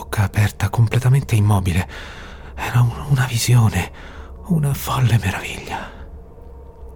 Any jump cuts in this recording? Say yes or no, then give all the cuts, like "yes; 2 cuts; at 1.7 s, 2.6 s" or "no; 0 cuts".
no; 0 cuts